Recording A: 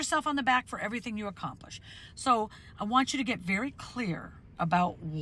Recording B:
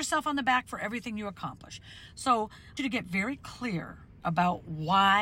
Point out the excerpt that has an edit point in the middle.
B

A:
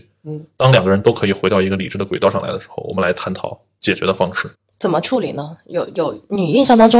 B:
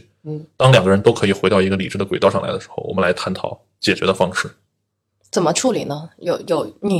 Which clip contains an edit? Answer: A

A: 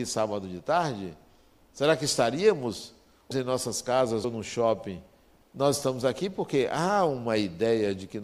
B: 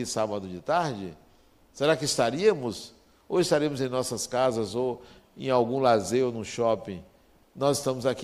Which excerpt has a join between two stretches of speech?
A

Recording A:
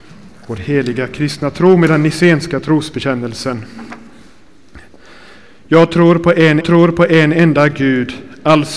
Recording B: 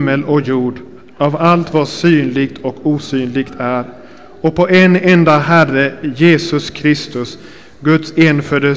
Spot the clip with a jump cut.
A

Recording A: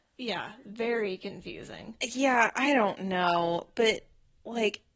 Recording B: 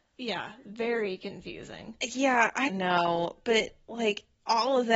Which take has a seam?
B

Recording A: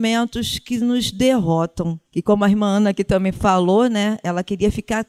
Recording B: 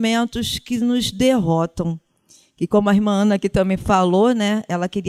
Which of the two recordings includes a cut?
A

